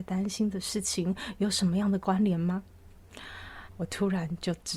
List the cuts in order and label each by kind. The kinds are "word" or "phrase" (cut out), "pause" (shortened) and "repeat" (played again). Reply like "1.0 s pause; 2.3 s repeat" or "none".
3.7 s pause